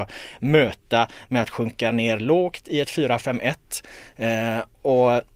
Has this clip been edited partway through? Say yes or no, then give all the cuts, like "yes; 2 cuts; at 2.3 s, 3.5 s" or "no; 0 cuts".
no; 0 cuts